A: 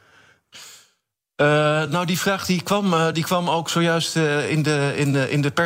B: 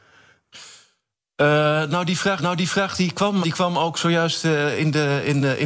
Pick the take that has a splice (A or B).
B